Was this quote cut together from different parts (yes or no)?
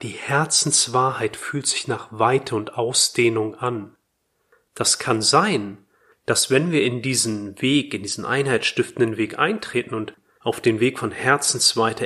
no